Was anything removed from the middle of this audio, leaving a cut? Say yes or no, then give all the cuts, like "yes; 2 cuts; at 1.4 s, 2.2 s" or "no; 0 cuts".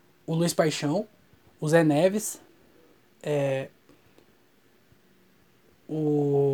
no; 0 cuts